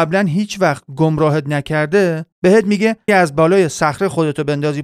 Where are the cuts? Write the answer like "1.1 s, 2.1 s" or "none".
2.3 s, 3.1 s